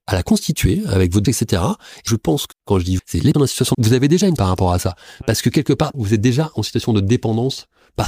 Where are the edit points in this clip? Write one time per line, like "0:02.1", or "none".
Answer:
0:01.3
0:02.1
0:02.5
0:03.0
0:03.3
0:03.7
0:04.4
0:05.9